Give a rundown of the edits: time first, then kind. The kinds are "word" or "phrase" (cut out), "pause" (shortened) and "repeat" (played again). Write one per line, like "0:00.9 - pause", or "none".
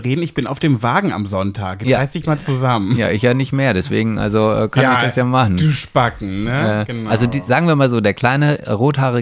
none